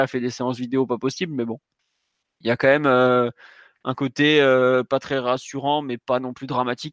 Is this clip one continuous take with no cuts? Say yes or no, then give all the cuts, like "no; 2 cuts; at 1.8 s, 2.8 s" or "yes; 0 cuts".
yes; 0 cuts